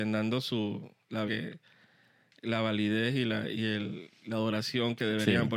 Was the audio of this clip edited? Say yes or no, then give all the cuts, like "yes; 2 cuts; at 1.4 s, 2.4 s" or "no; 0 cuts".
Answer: yes; 1 cut; at 1.3 s